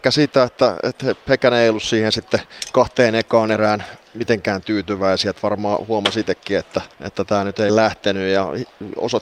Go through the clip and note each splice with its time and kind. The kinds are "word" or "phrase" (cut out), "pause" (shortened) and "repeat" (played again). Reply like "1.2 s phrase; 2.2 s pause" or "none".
6.9 s pause; 7.7 s word

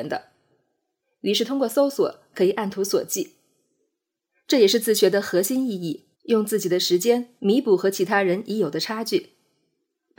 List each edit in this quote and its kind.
6.1 s pause; 7.4 s pause

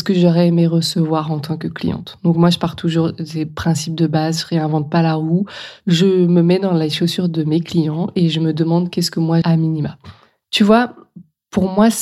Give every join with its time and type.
9.4 s word

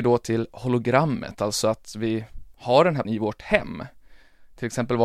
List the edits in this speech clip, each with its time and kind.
2.5 s pause; 3.0 s word

